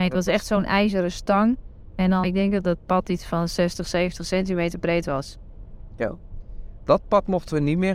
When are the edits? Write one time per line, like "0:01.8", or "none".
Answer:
0:02.2

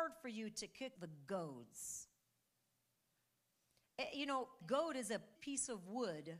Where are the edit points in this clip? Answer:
0:00.9
0:04.6
0:05.3

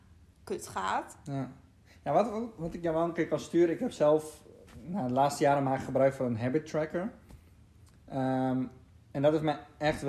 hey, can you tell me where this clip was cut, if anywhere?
none

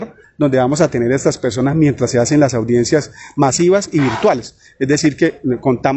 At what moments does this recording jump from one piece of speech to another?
none

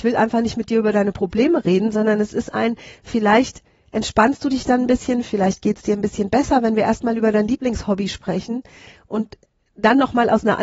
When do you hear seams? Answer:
none

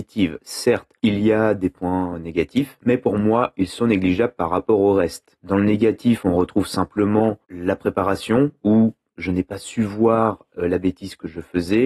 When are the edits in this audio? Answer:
0:07.4

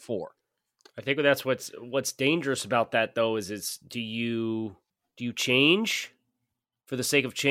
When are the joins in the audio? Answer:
0:04.9

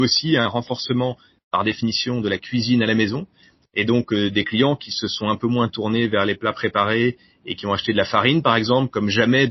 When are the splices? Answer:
none

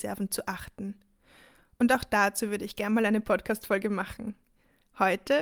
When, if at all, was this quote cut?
none

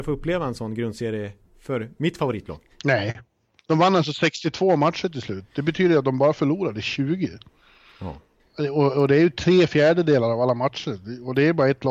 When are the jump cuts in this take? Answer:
none

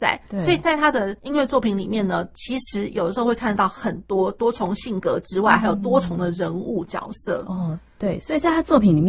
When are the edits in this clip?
0:01.2

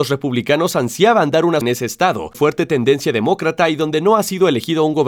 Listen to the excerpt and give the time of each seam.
0:01.6
0:02.3

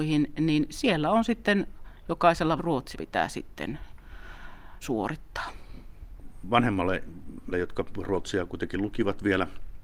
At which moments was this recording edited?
0:02.6
0:02.9
0:04.8
0:07.5

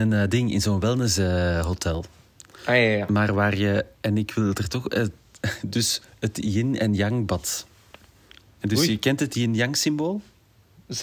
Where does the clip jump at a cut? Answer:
none

